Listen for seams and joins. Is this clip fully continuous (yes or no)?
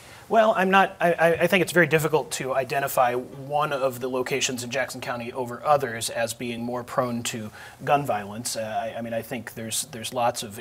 yes